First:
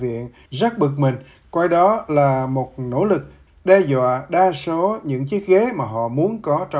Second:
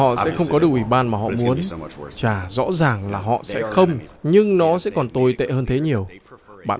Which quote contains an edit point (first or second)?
second